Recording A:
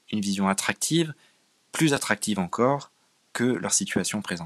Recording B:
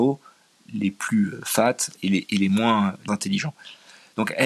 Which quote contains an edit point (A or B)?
B